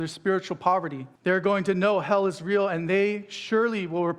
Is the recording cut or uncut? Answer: cut